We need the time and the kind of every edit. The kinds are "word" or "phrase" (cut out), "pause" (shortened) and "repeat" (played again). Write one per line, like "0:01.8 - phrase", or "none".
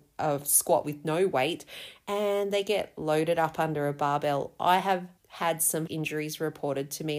0:05.2 - pause
0:05.9 - word